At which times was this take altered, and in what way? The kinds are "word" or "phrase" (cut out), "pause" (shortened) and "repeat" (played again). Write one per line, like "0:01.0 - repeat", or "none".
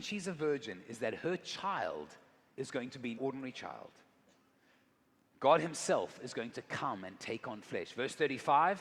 0:03.2 - word